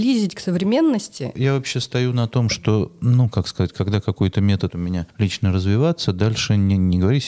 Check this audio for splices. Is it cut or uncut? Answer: cut